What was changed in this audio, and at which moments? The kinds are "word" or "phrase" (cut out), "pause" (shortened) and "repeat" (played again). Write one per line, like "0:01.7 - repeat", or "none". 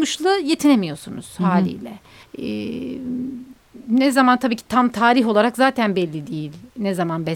0:02.2 - pause